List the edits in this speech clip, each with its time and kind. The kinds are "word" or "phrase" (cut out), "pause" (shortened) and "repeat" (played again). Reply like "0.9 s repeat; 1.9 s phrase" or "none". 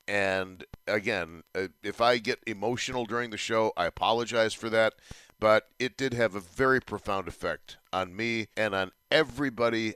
8.5 s pause